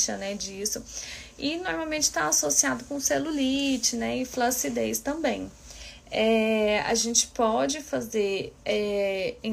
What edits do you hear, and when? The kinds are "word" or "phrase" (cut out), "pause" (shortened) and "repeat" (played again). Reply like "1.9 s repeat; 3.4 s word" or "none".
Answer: none